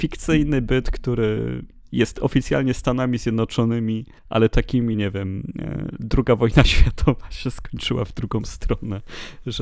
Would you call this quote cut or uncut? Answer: cut